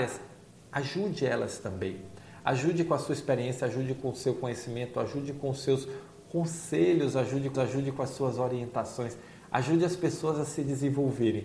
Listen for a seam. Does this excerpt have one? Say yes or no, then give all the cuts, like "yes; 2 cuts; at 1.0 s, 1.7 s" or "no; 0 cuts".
yes; 1 cut; at 7.5 s